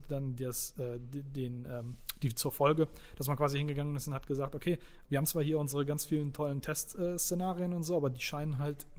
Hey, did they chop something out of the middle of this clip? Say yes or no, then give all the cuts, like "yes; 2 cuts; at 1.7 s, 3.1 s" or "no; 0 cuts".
yes; 1 cut; at 5.1 s